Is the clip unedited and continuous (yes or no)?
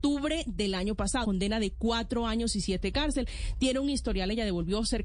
no